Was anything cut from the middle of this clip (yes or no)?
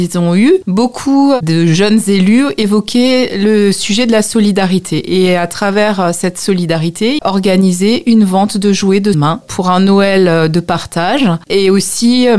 yes